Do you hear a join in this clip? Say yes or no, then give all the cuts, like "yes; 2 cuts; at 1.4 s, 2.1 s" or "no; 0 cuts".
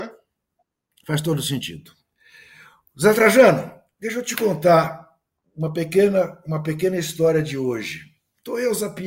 no; 0 cuts